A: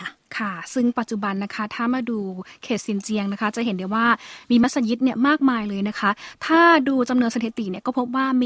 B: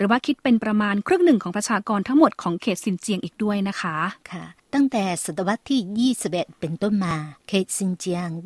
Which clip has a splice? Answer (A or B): B